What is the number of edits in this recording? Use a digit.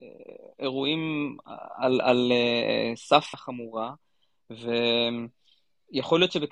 1